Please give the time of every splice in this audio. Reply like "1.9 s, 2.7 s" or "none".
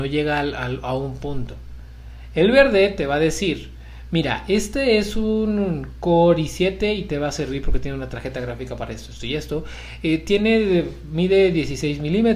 none